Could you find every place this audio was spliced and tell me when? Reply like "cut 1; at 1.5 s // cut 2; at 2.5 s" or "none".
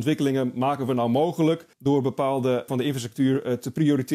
cut 1; at 1.7 s // cut 2; at 2.7 s

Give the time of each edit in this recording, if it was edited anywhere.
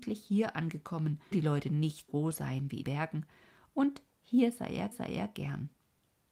cut 1; at 1.3 s // cut 2; at 2.1 s // cut 3; at 2.8 s // cut 4; at 4.9 s

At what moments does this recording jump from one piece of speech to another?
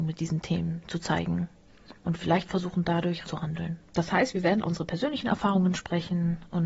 cut 1; at 2.0 s // cut 2; at 3.2 s // cut 3; at 3.9 s // cut 4; at 4.6 s

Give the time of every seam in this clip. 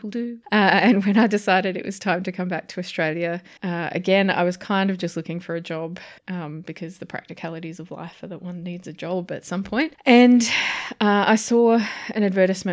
cut 1; at 3.6 s // cut 2; at 6.2 s

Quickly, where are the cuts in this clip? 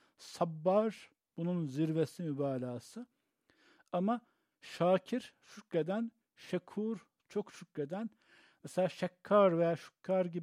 none

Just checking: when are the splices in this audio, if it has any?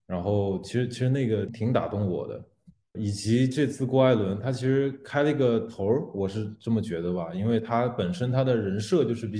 none

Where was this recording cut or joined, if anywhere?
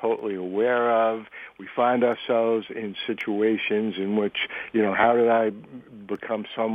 none

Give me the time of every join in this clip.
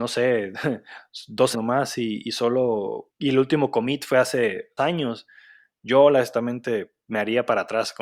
cut 1; at 1.5 s // cut 2; at 3.1 s // cut 3; at 4.8 s

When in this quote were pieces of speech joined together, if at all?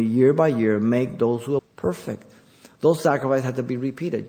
cut 1; at 1.6 s

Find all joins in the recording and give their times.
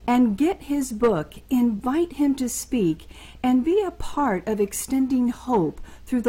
none

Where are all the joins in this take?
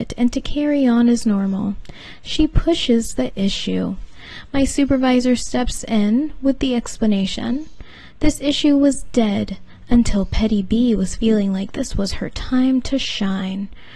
none

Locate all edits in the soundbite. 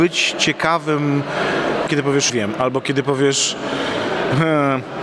cut 1; at 1.9 s // cut 2; at 2.3 s

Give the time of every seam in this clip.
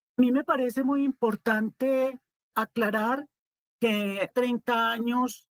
cut 1; at 2.5 s // cut 2; at 4.3 s

